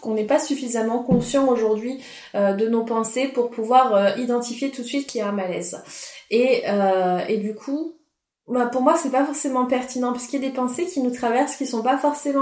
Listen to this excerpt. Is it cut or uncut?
uncut